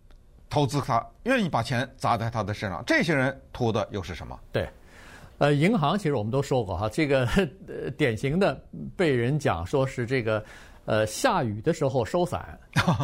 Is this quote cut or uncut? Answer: uncut